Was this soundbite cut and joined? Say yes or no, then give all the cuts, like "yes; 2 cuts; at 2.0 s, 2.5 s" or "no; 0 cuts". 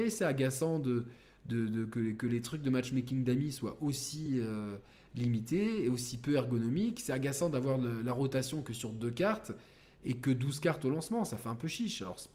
no; 0 cuts